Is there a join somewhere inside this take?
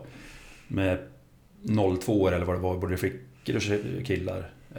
no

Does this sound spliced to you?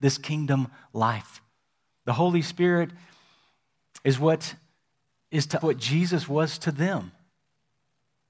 yes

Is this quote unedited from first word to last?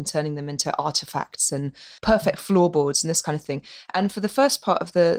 no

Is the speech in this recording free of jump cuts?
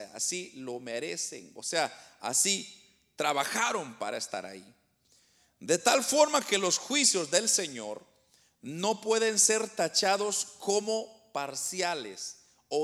yes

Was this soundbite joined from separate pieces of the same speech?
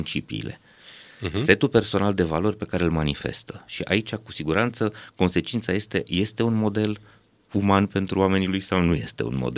no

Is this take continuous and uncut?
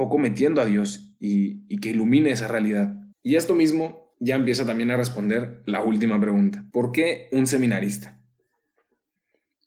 no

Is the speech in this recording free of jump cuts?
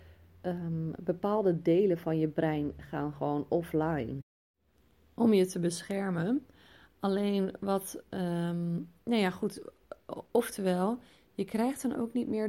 yes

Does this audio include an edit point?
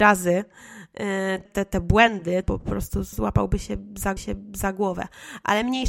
yes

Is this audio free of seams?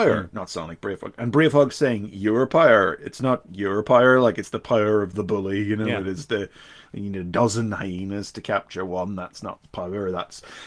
yes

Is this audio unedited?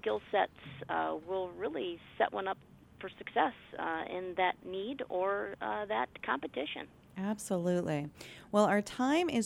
yes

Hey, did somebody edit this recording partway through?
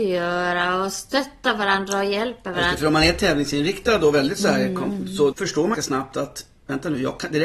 yes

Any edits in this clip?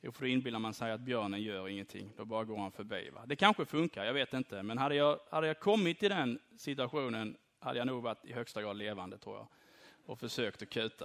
no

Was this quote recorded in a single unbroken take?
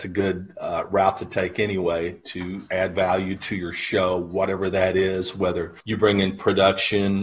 no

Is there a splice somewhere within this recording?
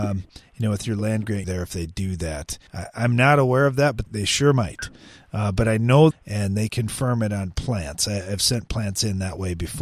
yes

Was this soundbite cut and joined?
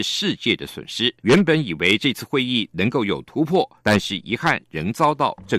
yes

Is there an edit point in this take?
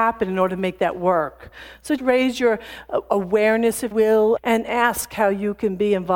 yes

